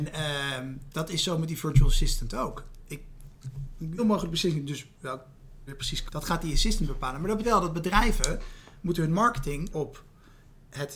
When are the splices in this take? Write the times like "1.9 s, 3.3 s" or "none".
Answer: 4.0 s, 5.7 s, 6.1 s, 7.4 s, 9.7 s